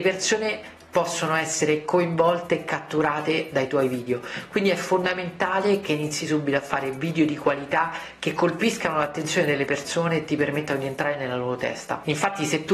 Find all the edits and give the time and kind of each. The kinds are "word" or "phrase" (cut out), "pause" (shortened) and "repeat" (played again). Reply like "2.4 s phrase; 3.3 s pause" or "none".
none